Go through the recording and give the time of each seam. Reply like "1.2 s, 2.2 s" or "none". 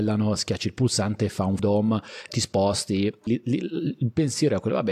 1.6 s, 2.3 s, 3.3 s